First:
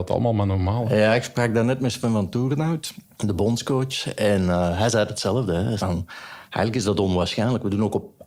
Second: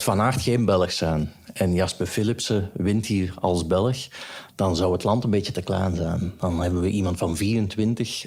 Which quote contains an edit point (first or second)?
first